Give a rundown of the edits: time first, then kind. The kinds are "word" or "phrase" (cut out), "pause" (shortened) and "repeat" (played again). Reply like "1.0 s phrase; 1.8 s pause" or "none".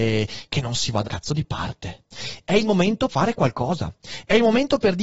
1.1 s word; 3.1 s word